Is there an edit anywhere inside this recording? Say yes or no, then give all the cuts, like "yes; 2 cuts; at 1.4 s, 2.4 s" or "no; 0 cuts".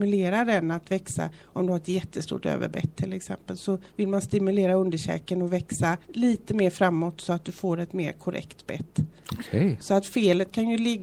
yes; 2 cuts; at 3.9 s, 6.0 s